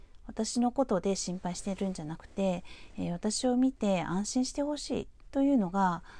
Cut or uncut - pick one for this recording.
cut